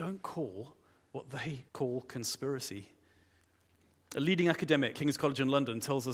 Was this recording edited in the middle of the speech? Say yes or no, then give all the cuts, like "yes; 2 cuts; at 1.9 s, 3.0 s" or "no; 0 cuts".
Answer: yes; 2 cuts; at 1.7 s, 4.9 s